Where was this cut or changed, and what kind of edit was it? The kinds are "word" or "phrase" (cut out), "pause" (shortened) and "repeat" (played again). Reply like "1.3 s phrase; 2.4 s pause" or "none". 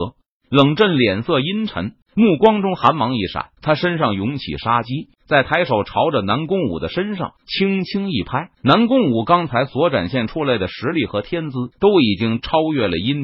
2.0 s pause; 3.6 s pause; 5.2 s pause; 7.4 s pause; 8.5 s pause; 11.7 s pause